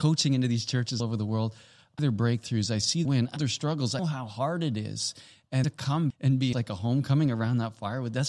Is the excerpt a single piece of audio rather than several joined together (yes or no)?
no